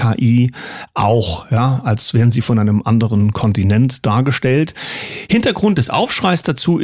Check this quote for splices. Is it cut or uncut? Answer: uncut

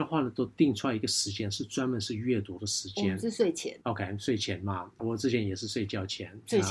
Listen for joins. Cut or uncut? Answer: cut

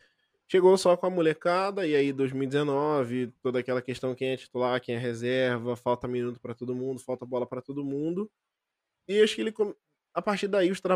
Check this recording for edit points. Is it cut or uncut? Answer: uncut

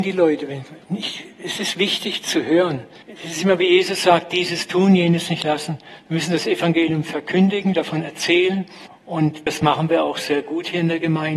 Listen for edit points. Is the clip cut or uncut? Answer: uncut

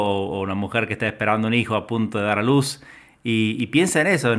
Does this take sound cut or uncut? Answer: uncut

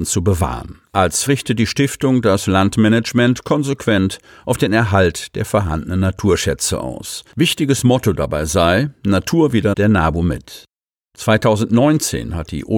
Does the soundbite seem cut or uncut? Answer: cut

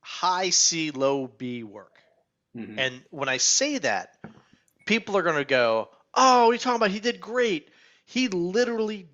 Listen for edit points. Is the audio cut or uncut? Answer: uncut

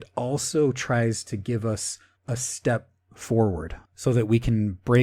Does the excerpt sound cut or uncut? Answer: cut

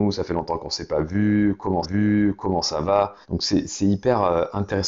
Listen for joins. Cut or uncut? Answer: cut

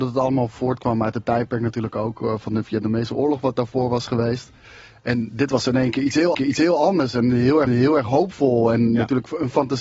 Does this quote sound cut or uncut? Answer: cut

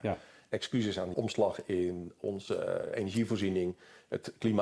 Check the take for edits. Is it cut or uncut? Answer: cut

